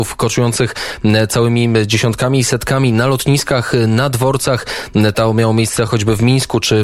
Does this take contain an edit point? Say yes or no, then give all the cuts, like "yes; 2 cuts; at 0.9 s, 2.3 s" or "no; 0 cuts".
no; 0 cuts